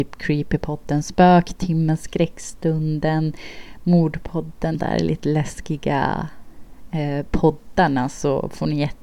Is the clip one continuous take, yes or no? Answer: no